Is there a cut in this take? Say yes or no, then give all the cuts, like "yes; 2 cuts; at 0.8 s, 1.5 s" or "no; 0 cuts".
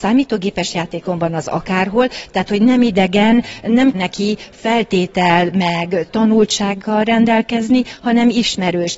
yes; 1 cut; at 3.9 s